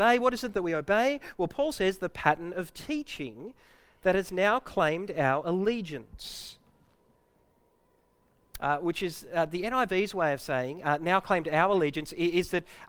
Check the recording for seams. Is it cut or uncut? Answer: uncut